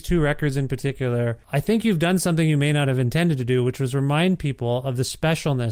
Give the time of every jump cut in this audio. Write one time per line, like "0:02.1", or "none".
0:01.4

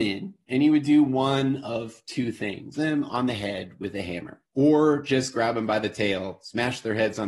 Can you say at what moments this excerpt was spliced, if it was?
0:02.7
0:04.5

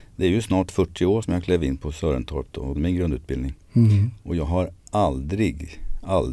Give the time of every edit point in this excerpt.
0:01.2
0:02.8
0:04.8

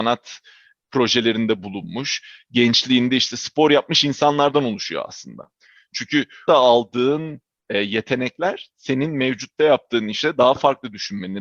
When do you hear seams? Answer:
0:06.5

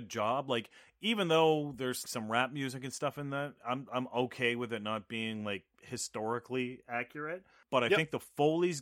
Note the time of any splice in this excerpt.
0:02.0

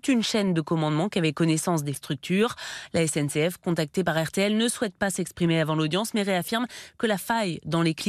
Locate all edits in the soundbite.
0:02.0

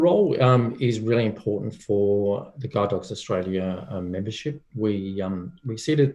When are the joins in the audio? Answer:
none

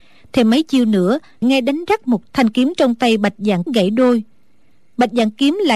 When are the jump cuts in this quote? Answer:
0:01.4
0:02.3
0:03.7

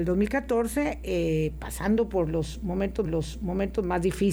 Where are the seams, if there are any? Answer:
0:03.0

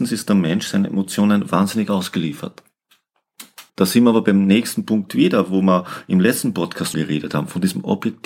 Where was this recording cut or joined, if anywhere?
0:03.7
0:06.9

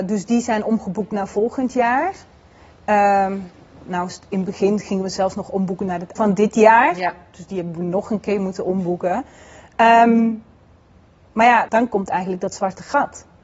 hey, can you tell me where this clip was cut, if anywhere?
0:06.2
0:11.7

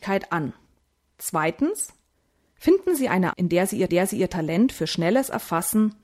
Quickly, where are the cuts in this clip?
0:02.1
0:03.3
0:03.9

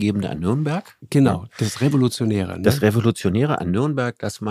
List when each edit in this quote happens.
none

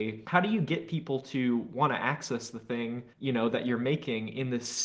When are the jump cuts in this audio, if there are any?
0:03.1

